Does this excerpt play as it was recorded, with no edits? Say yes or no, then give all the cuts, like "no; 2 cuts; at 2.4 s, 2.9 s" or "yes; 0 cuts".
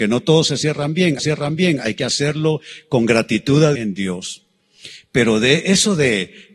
no; 2 cuts; at 1.2 s, 3.8 s